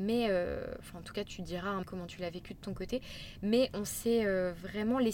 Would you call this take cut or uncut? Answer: cut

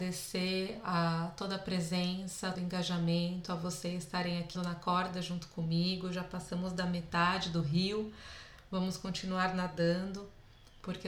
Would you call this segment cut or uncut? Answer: cut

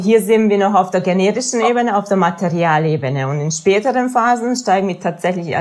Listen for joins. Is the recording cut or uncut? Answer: uncut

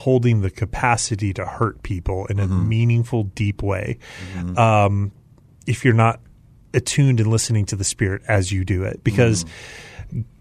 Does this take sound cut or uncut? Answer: uncut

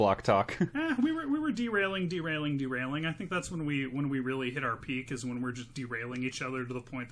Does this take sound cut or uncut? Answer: uncut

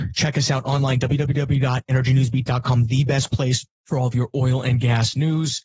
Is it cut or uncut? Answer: uncut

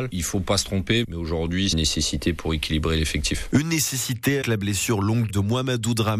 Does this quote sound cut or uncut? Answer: cut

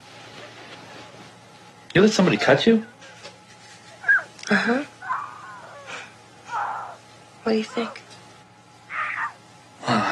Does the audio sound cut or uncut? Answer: uncut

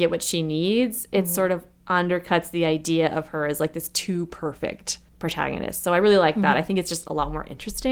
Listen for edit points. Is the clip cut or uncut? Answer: cut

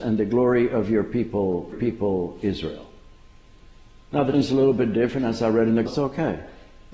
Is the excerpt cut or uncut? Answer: cut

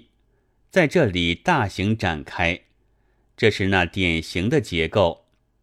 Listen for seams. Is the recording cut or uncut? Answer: uncut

